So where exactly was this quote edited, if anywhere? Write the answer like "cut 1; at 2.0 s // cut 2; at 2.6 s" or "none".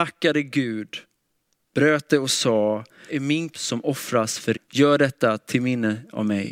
cut 1; at 3.1 s // cut 2; at 3.5 s // cut 3; at 4.5 s